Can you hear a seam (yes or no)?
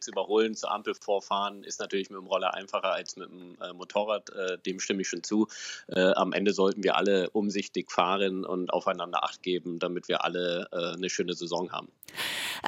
no